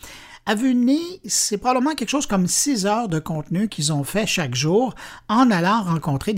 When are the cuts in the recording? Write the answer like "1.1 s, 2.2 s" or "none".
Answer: none